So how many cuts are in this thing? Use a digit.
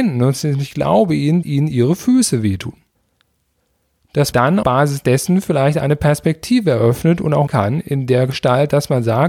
4